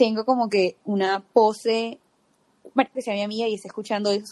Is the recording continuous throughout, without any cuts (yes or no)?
no